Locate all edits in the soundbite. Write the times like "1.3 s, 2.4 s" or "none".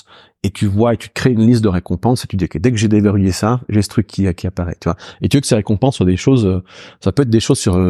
none